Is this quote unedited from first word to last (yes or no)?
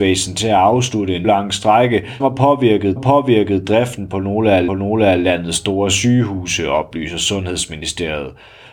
no